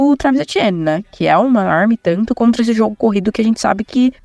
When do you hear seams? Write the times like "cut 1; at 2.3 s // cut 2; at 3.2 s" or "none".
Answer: none